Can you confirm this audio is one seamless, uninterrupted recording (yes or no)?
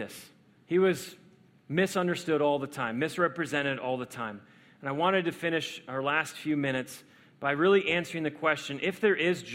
yes